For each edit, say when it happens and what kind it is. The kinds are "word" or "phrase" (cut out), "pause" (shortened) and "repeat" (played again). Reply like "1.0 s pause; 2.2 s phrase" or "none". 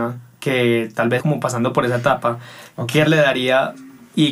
1.2 s word; 3.1 s word